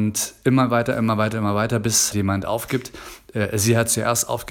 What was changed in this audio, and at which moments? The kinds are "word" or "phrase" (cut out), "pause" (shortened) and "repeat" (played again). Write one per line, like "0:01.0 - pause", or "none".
0:02.1 - word